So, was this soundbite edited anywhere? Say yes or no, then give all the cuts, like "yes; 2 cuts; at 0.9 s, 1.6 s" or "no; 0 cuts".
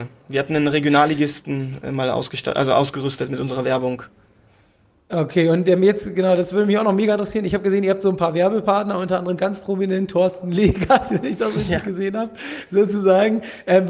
no; 0 cuts